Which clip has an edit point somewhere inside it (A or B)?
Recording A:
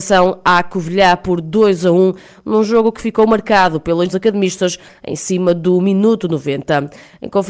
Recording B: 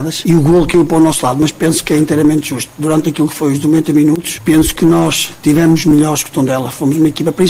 A